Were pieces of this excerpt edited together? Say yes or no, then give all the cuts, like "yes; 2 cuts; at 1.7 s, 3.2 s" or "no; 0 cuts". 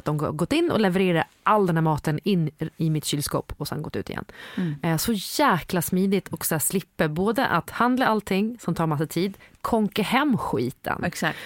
no; 0 cuts